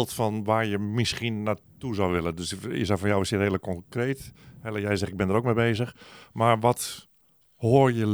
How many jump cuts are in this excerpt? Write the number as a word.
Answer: zero